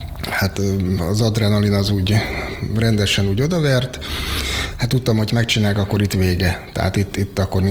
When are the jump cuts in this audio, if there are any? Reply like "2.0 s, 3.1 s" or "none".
5.3 s